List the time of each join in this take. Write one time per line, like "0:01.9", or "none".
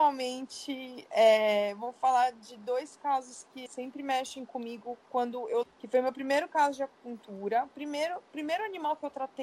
0:03.7
0:05.6